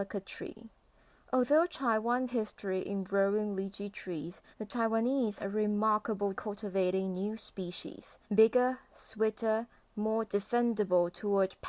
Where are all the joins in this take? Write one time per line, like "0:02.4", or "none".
0:00.9
0:02.3
0:04.5
0:05.4
0:06.4
0:08.2